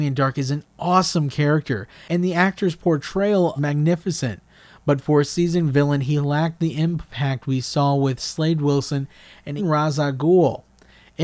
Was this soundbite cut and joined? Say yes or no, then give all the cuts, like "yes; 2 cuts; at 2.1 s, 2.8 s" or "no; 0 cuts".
yes; 2 cuts; at 3.6 s, 9.6 s